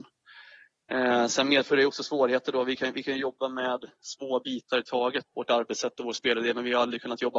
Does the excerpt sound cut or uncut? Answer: cut